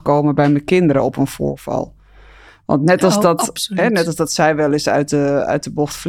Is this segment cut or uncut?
uncut